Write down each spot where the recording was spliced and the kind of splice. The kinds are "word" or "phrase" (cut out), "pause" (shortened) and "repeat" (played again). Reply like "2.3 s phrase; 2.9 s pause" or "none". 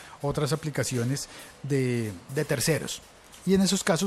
none